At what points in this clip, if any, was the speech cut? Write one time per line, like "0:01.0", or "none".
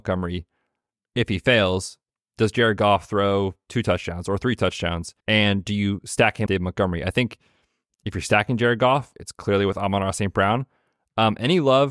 0:05.2
0:06.5